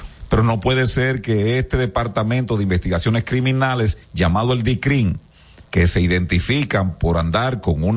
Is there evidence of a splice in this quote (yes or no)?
yes